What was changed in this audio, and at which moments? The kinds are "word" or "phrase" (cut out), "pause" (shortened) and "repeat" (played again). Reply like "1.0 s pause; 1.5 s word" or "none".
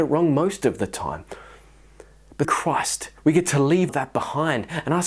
2.4 s word; 3.2 s pause; 3.9 s word